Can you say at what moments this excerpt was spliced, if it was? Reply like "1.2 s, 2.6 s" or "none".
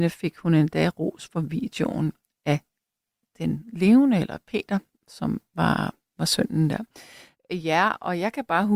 none